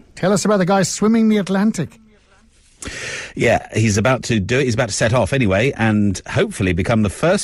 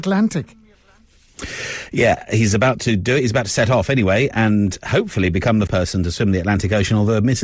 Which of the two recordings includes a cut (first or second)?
second